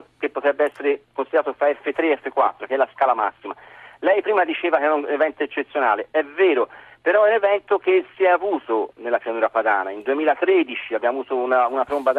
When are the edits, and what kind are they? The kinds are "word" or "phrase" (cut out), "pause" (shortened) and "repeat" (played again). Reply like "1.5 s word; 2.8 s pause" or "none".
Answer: none